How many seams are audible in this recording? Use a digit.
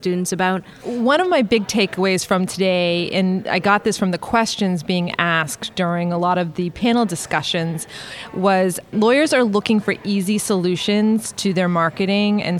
1